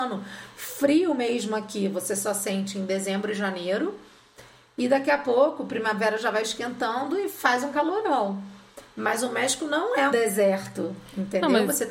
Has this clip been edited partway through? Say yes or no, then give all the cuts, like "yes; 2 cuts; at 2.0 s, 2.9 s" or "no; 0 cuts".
yes; 1 cut; at 10.1 s